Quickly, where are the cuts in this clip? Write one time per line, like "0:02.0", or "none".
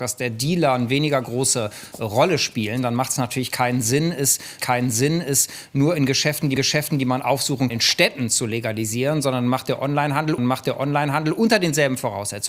0:04.6
0:06.6
0:07.7
0:10.4